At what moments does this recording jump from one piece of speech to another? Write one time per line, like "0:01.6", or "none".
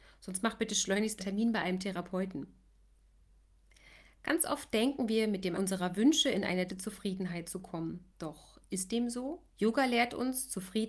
0:01.2
0:05.5
0:06.7
0:08.1
0:09.5